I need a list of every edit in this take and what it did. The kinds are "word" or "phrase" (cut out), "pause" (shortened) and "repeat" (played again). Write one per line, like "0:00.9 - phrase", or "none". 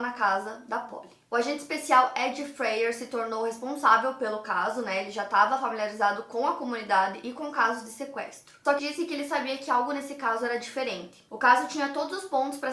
0:08.8 - word